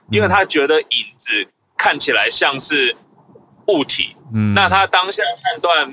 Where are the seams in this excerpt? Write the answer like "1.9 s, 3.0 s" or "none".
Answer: none